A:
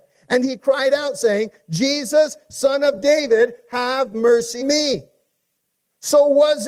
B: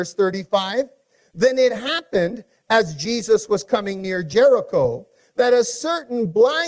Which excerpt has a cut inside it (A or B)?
A